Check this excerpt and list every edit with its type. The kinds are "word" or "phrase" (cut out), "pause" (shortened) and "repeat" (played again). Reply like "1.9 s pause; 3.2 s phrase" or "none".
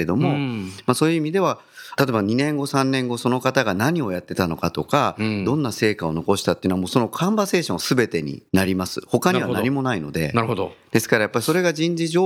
8.5 s pause